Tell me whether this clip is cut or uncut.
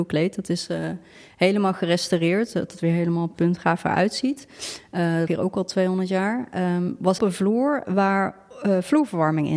cut